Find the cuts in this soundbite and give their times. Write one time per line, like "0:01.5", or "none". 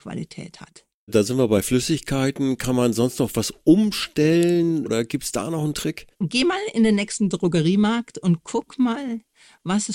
0:06.1